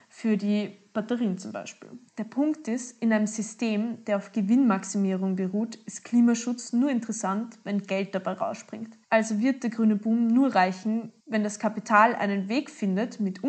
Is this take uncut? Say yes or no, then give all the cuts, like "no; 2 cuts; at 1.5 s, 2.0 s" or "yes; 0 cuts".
no; 3 cuts; at 2.1 s, 9.0 s, 11.2 s